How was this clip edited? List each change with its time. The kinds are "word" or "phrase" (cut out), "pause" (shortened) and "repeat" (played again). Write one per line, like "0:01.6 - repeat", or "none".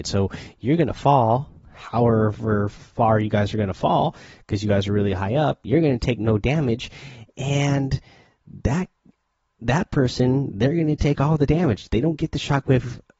none